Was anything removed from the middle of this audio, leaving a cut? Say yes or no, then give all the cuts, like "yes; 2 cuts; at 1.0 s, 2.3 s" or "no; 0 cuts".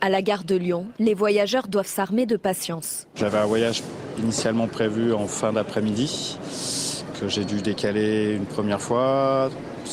no; 0 cuts